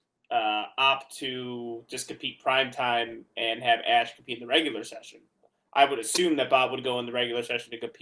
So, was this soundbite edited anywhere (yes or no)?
no